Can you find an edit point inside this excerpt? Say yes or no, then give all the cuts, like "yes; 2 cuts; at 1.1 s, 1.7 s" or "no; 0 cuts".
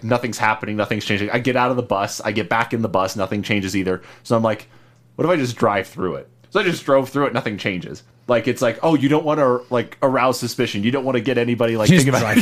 no; 0 cuts